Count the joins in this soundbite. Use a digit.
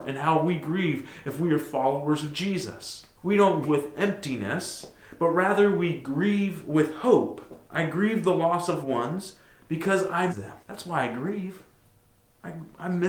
6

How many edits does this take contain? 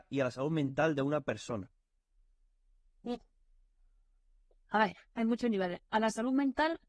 0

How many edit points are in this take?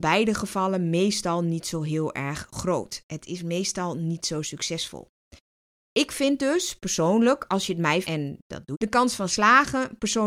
2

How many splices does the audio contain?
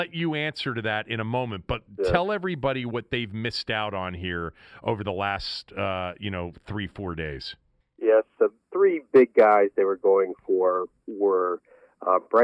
2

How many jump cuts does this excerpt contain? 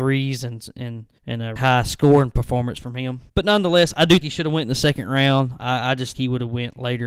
5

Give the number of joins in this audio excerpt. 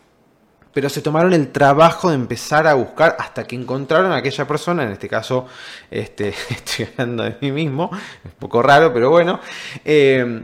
0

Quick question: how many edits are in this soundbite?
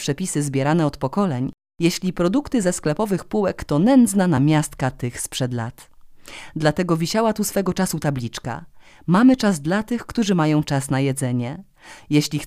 0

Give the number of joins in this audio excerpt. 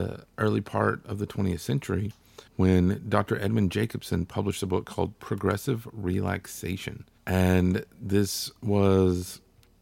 2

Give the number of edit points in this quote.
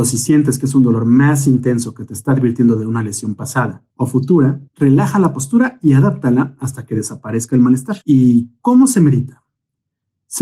3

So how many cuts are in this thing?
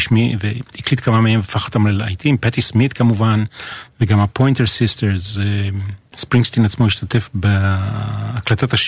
0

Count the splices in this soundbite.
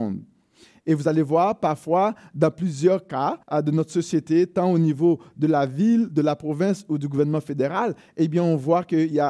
1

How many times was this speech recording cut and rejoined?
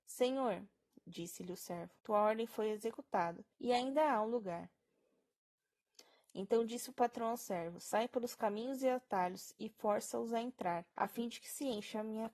3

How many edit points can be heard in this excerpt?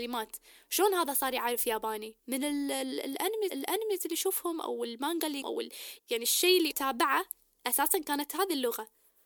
5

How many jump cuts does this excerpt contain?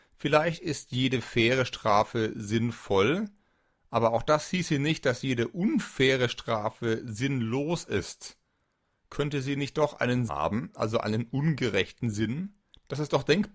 1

